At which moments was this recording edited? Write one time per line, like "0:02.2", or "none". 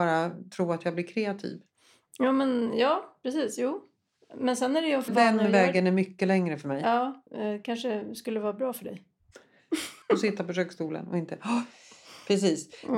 0:05.1
0:07.3
0:10.0